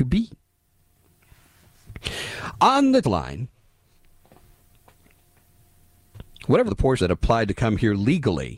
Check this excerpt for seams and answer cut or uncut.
cut